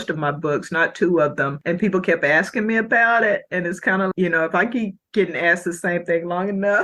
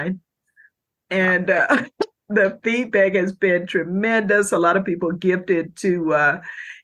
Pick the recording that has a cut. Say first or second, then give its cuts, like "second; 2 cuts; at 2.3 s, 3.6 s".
first; 1 cut; at 4.1 s